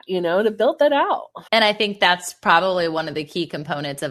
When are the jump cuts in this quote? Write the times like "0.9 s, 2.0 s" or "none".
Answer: 1.5 s